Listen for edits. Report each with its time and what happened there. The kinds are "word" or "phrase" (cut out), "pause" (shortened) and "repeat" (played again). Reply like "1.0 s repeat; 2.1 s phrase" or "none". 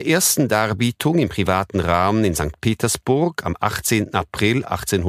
none